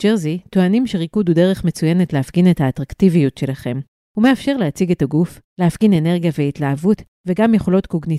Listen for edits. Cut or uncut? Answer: uncut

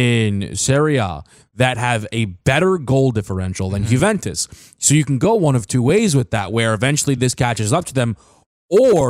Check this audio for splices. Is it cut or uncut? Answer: uncut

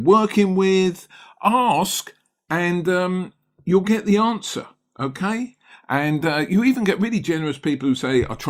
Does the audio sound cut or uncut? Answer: uncut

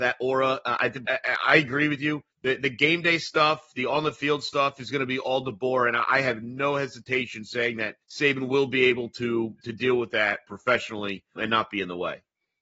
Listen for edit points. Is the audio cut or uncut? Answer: cut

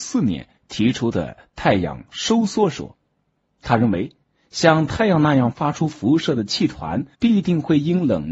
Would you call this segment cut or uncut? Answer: cut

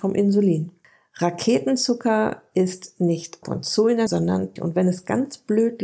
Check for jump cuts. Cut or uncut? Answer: cut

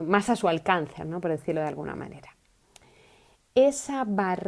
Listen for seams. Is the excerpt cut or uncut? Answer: uncut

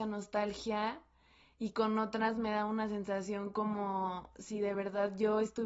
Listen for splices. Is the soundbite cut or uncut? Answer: uncut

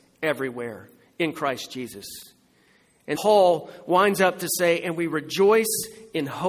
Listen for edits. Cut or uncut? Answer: cut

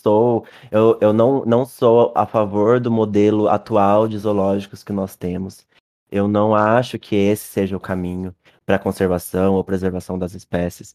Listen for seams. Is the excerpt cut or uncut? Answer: uncut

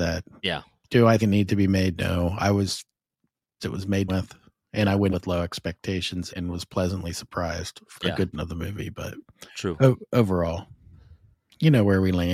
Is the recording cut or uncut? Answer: cut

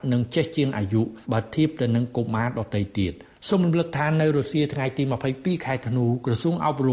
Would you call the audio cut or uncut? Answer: cut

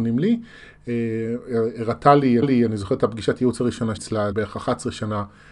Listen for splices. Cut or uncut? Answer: cut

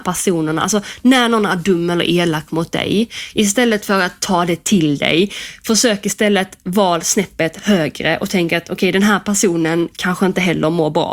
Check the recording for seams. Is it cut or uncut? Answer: uncut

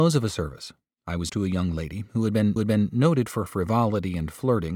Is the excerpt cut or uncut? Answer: cut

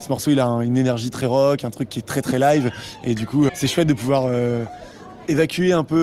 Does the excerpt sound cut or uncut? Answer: cut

